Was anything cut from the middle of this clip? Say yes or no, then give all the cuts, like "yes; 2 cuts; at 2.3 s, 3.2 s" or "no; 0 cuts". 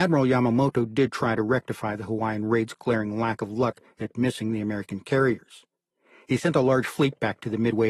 no; 0 cuts